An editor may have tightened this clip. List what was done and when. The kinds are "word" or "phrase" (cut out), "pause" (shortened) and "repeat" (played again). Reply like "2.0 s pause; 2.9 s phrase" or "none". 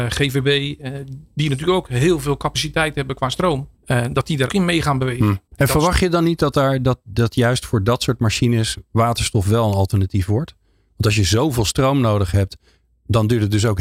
3.8 s pause; 4.5 s word; 5.5 s pause